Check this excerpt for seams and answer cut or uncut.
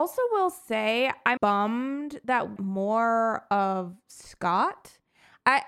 cut